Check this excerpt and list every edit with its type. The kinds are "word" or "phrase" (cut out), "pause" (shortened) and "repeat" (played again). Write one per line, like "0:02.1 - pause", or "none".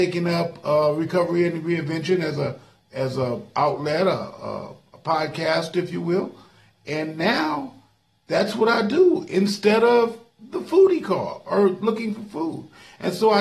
none